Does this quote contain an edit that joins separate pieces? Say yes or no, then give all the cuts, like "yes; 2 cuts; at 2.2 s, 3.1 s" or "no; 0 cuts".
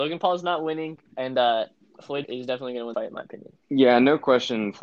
yes; 4 cuts; at 1.1 s, 2.2 s, 2.9 s, 3.6 s